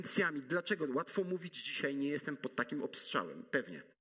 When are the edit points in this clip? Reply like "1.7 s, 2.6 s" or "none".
none